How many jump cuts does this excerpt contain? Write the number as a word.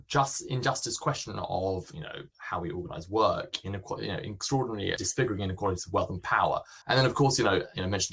three